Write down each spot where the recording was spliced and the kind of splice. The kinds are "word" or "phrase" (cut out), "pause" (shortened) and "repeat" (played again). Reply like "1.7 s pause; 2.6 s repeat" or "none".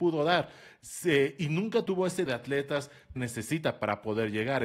1.9 s word; 2.3 s word; 3.2 s word